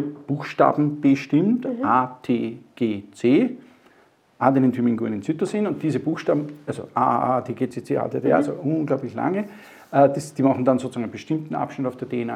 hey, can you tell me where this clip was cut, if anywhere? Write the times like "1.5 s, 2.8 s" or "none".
7.7 s